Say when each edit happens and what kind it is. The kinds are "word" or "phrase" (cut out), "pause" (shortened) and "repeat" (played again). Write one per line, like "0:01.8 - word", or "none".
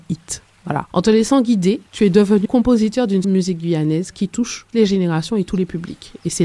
0:01.9 - pause
0:02.4 - phrase
0:03.2 - word
0:04.7 - word